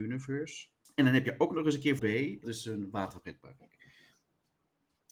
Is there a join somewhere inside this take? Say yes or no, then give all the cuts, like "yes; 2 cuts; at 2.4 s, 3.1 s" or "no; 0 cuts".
yes; 2 cuts; at 2.0 s, 2.4 s